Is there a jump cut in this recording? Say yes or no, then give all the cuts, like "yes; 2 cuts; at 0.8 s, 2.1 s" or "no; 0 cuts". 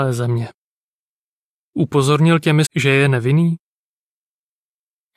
yes; 1 cut; at 2.6 s